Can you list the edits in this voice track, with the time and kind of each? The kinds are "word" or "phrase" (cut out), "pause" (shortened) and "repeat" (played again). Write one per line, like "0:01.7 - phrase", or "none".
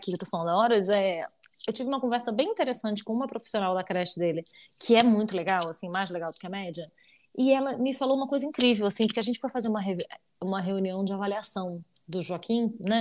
none